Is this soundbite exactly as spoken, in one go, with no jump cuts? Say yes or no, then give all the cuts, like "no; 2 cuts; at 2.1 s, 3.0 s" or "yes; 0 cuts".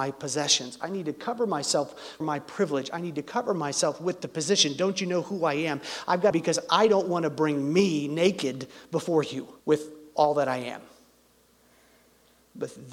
no; 3 cuts; at 2.2 s, 6.3 s, 9.6 s